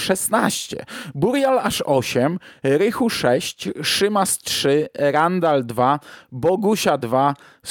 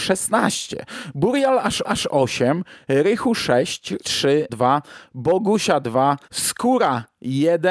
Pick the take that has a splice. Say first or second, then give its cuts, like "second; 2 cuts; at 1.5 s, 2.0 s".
second; 4 cuts; at 1.8 s, 4.0 s, 4.5 s, 6.2 s